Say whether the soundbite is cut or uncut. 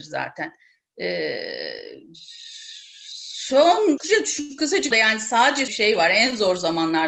cut